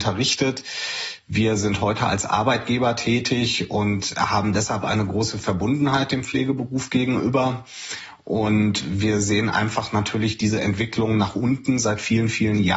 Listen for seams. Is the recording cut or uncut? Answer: uncut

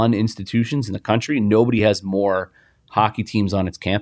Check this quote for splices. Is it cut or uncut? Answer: uncut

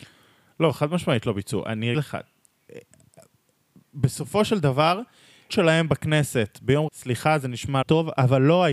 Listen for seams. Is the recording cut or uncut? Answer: cut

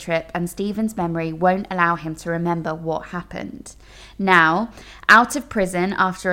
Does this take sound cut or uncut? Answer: uncut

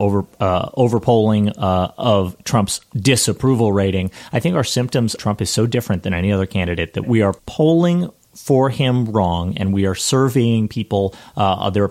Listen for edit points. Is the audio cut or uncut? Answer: cut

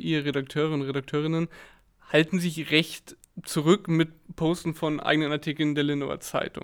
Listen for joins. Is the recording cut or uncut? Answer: uncut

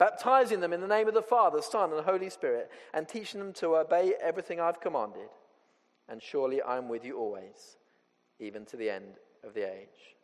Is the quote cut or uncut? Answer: uncut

